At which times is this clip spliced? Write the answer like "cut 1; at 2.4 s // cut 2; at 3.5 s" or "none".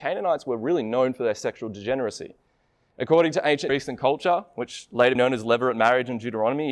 cut 1; at 3.7 s // cut 2; at 5.2 s